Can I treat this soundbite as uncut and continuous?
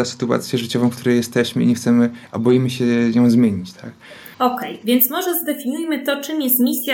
no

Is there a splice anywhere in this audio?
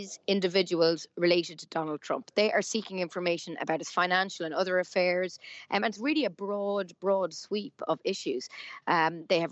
no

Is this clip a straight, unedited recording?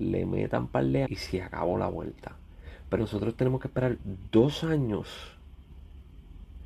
no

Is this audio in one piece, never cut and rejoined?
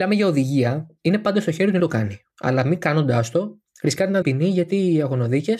no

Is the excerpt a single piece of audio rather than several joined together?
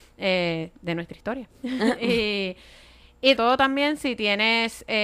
no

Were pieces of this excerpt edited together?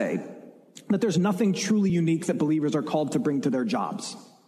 no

